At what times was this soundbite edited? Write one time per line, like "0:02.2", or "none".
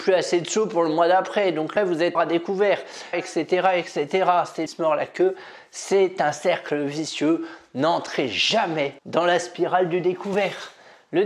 0:01.8
0:02.1
0:03.1
0:04.7
0:09.0